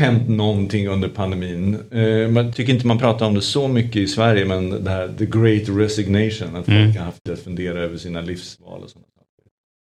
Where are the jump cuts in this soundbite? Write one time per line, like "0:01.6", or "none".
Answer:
0:02.5
0:07.3